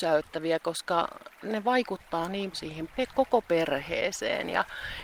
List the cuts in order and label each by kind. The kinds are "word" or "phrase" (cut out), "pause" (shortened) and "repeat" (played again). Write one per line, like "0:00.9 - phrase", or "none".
0:02.5 - word